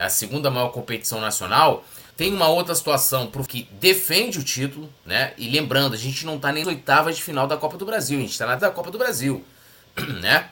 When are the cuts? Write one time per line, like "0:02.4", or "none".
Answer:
0:02.1
0:03.5
0:05.0
0:06.6
0:08.6